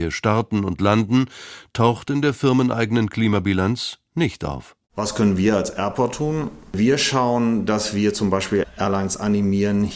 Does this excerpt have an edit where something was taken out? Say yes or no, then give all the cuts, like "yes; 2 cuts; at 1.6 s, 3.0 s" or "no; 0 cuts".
yes; 1 cut; at 4.8 s